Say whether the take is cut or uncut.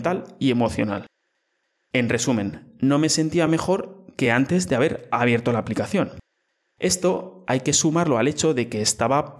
uncut